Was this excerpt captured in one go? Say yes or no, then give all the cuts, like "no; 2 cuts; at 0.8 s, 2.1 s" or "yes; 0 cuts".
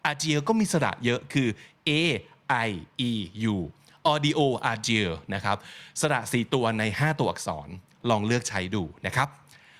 yes; 0 cuts